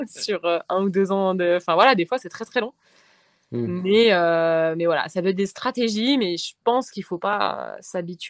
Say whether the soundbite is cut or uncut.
uncut